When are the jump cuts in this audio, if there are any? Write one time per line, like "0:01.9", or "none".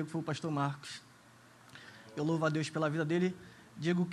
none